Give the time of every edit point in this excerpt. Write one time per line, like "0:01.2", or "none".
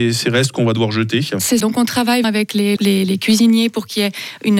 0:01.6
0:02.2
0:02.8